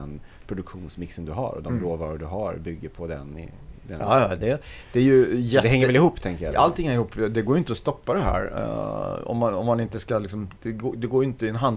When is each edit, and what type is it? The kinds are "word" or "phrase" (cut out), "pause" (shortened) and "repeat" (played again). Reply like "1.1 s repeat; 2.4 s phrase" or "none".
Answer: none